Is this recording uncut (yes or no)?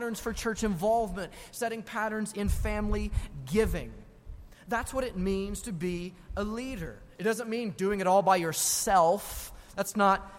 yes